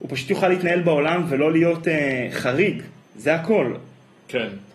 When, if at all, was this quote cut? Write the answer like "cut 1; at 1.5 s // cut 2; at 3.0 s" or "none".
cut 1; at 3.0 s